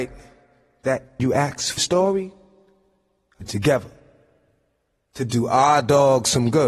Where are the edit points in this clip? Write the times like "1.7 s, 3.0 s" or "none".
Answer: 1.2 s, 1.8 s, 3.4 s